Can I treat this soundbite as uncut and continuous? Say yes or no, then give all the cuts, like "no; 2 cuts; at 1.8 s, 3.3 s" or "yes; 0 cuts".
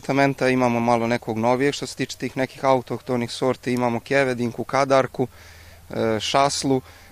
yes; 0 cuts